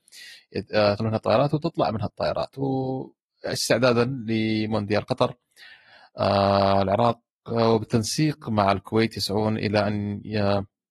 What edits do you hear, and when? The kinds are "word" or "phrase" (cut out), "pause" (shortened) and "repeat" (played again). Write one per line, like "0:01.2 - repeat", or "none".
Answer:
0:01.0 - word